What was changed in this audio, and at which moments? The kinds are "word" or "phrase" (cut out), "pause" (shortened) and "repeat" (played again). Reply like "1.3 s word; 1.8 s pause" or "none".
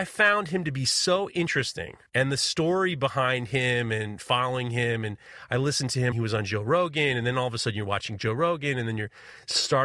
2.1 s pause; 6.1 s phrase